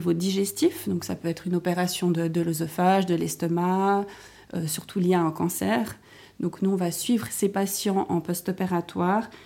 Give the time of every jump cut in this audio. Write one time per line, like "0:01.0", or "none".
none